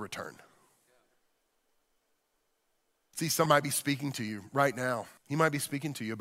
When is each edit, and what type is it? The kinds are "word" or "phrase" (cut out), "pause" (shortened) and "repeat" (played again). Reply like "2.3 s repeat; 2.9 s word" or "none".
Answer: 3.5 s phrase; 5.2 s pause